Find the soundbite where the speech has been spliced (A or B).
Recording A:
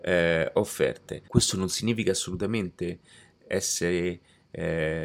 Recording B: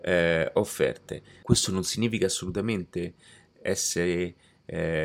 A